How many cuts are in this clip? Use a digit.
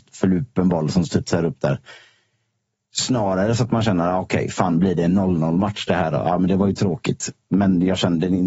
0